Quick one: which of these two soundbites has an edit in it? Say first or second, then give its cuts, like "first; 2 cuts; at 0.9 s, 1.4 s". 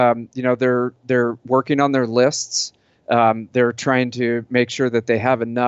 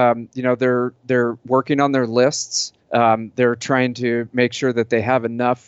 second; 1 cut; at 2.8 s